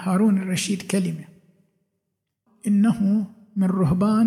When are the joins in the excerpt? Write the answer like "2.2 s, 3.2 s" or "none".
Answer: 2.5 s